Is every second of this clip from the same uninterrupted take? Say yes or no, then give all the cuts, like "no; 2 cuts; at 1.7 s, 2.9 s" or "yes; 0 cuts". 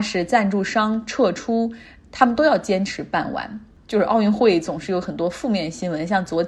yes; 0 cuts